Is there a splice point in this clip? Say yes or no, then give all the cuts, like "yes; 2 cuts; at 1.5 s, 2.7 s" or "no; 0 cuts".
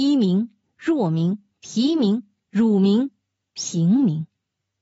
no; 0 cuts